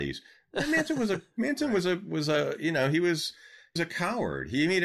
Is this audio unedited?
no; 1 cut; at 3.8 s

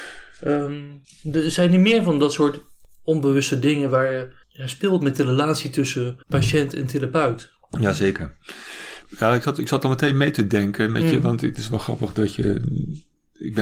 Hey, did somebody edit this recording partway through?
yes; 2 cuts; at 4.4 s, 6.2 s

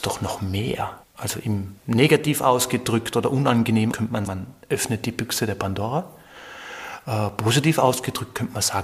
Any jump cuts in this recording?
yes; 4 cuts; at 1.0 s, 1.8 s, 3.9 s, 4.3 s

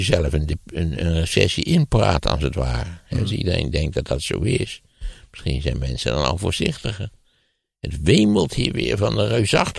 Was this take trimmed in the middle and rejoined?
no; 0 cuts

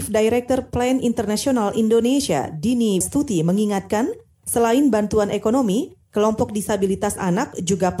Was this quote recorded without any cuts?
no; 1 cut; at 3.0 s

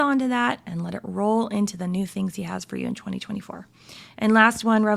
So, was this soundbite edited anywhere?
no; 0 cuts

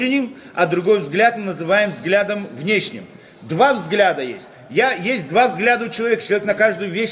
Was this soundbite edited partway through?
no; 0 cuts

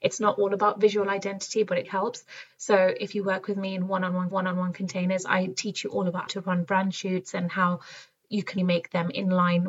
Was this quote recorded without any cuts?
no; 4 cuts; at 1.8 s, 4.3 s, 6.3 s, 8.6 s

